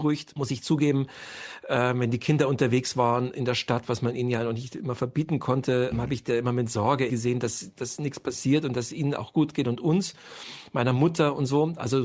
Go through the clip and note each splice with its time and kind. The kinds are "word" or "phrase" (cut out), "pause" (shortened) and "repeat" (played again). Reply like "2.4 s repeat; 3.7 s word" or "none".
5.9 s word; 7.1 s word